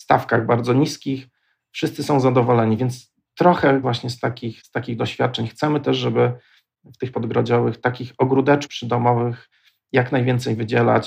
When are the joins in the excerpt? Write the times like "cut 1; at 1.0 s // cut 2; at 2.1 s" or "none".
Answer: cut 1; at 3.8 s // cut 2; at 7.1 s